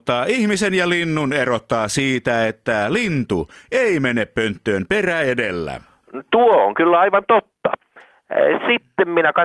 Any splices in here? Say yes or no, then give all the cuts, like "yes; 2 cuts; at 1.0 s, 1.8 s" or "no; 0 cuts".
no; 0 cuts